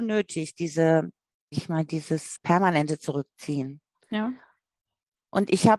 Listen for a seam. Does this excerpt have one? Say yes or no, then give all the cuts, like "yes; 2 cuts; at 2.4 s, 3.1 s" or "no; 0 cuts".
yes; 2 cuts; at 1.5 s, 2.4 s